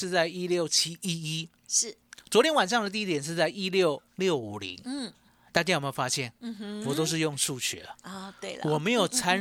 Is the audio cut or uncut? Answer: cut